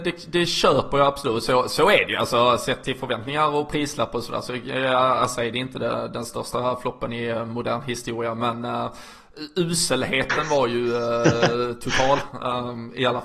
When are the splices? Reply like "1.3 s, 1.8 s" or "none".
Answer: none